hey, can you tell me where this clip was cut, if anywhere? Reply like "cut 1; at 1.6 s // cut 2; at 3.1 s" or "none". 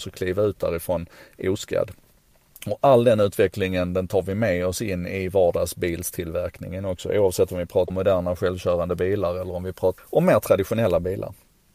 cut 1; at 7.9 s // cut 2; at 10.0 s